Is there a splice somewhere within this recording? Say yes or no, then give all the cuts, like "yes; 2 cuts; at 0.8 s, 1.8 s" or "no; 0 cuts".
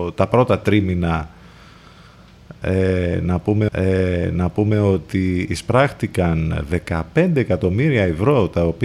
yes; 1 cut; at 3.7 s